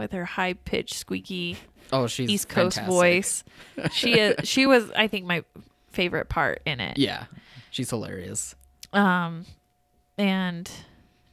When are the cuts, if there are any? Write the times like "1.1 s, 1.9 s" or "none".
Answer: none